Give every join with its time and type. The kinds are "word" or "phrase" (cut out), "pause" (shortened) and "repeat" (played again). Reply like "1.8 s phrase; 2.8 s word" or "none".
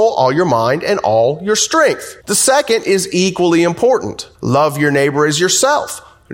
2.2 s pause; 4.3 s pause